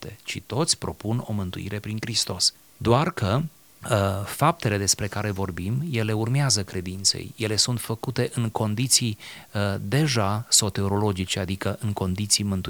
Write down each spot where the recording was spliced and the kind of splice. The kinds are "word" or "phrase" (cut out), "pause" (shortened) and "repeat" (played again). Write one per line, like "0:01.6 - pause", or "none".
none